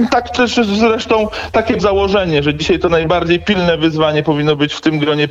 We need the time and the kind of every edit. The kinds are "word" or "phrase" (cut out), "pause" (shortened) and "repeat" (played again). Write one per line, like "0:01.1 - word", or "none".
0:01.8 - word

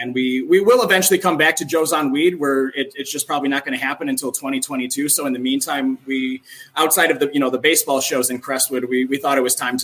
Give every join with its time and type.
none

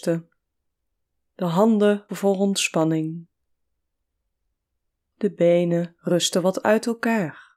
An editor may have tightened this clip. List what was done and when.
0:02.1 - word

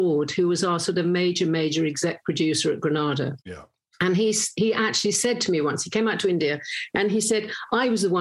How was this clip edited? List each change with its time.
0:03.4 - pause

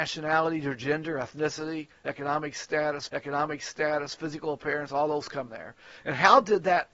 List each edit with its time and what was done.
0:03.1 - repeat
0:05.5 - word

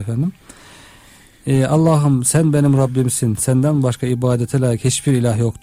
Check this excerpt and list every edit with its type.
none

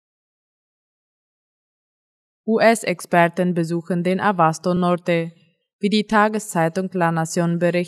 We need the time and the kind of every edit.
none

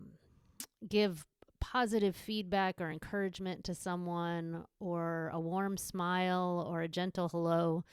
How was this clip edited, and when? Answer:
none

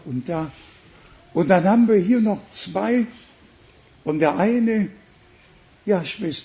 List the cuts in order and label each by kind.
none

